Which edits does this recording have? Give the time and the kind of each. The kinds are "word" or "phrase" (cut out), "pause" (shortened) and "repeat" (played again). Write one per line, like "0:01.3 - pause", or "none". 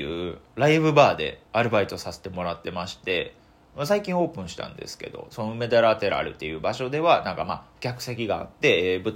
0:01.5 - pause